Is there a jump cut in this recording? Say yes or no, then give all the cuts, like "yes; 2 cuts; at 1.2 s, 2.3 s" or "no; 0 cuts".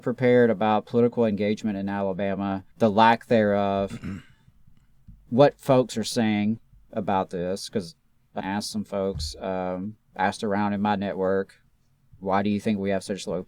yes; 2 cuts; at 2.7 s, 8.4 s